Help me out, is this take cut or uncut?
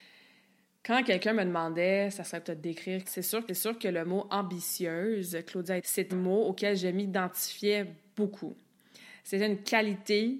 cut